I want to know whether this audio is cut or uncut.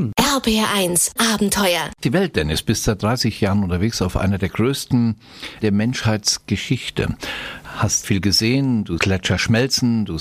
cut